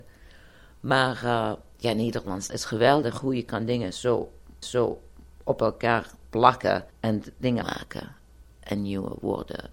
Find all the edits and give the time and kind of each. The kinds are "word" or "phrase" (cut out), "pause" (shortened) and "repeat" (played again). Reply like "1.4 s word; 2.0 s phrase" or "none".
2.5 s word; 4.6 s repeat; 6.9 s pause; 7.6 s phrase